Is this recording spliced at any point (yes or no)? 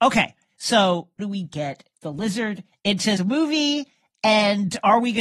yes